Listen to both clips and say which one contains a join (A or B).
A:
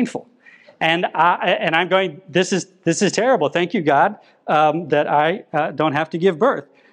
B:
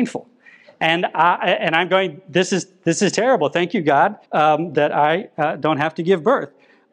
B